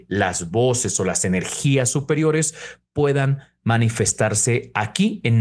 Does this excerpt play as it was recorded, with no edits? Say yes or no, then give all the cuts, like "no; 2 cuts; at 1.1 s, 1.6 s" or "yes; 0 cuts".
yes; 0 cuts